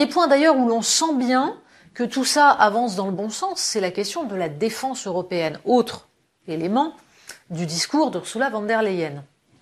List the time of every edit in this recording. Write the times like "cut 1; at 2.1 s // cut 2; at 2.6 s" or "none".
none

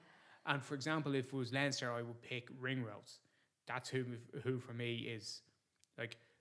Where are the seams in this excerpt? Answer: none

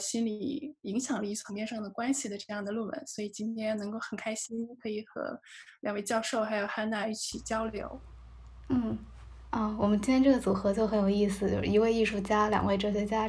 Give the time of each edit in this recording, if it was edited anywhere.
none

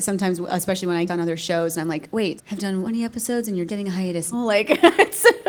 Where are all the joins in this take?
cut 1; at 1.1 s // cut 2; at 2.4 s // cut 3; at 2.8 s // cut 4; at 3.7 s // cut 5; at 4.3 s

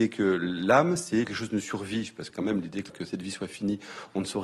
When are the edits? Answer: cut 1; at 1.2 s // cut 2; at 2.3 s // cut 3; at 2.9 s

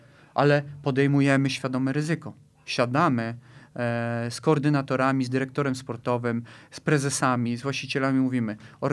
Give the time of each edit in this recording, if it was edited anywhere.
none

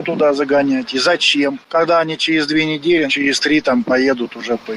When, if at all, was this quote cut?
cut 1; at 3.1 s

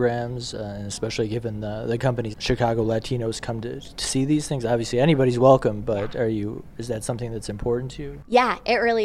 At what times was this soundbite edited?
cut 1; at 2.3 s

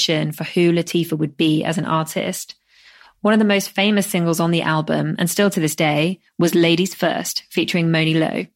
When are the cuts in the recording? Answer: none

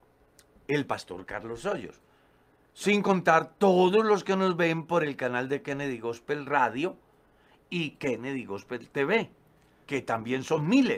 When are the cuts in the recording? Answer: none

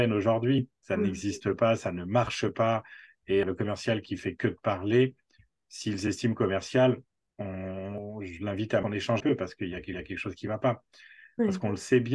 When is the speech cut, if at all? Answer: cut 1; at 3.4 s // cut 2; at 8.8 s // cut 3; at 9.2 s // cut 4; at 9.9 s

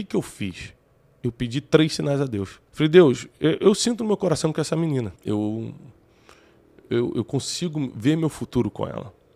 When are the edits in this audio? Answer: cut 1; at 2.7 s // cut 2; at 5.2 s

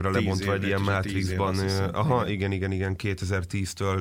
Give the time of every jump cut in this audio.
none

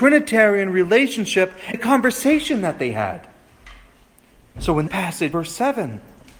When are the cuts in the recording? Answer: cut 1; at 1.7 s // cut 2; at 4.9 s // cut 3; at 5.3 s

